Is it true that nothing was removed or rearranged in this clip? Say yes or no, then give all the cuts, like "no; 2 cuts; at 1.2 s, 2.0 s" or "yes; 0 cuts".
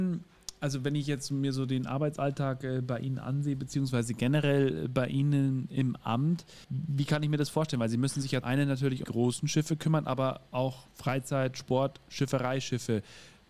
no; 4 cuts; at 6.6 s, 8.4 s, 9.0 s, 10.9 s